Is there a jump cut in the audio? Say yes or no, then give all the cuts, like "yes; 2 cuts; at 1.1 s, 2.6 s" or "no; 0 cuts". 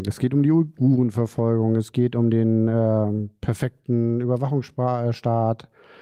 no; 0 cuts